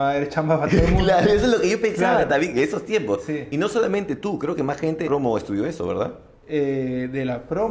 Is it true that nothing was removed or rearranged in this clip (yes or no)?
no